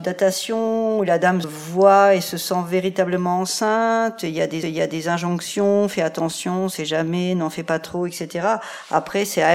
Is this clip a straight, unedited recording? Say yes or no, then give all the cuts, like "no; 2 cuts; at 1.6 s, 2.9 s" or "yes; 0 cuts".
no; 2 cuts; at 1.4 s, 4.6 s